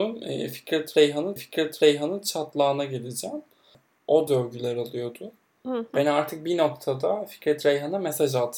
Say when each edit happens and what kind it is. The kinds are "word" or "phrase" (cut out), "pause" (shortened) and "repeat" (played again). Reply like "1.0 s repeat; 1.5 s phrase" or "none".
1.4 s repeat; 4.3 s phrase